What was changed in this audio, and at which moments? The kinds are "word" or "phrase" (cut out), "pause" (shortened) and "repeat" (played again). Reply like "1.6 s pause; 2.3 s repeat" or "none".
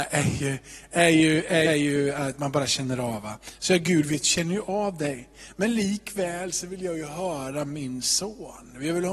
1.7 s phrase